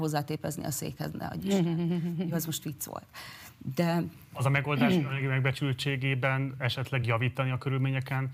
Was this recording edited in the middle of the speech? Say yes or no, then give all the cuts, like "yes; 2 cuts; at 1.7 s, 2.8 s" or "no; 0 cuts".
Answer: no; 0 cuts